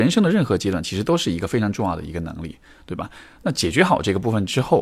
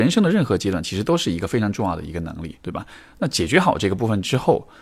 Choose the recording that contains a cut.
second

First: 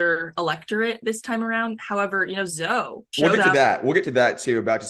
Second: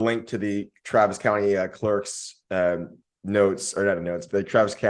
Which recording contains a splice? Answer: first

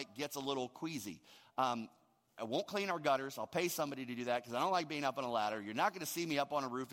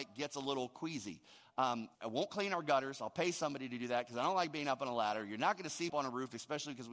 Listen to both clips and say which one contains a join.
second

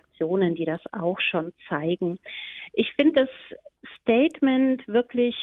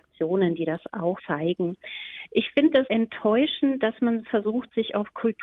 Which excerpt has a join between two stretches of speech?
second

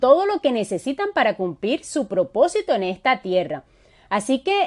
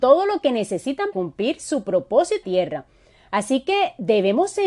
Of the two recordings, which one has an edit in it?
second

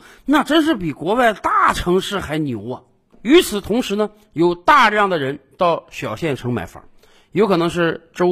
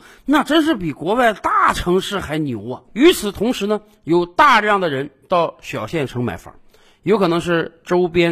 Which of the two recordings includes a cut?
second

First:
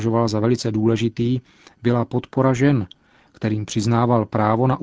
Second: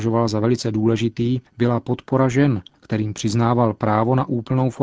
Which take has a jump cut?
second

